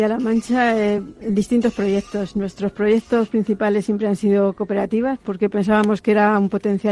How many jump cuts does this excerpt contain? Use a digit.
0